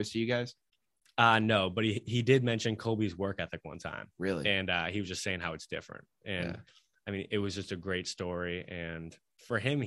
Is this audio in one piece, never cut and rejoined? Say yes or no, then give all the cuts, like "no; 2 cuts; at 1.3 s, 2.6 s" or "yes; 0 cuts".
yes; 0 cuts